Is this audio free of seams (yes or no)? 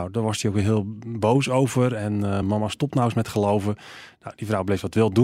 yes